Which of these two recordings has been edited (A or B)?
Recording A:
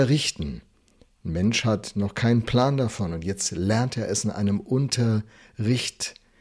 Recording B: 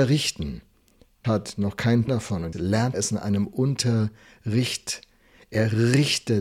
B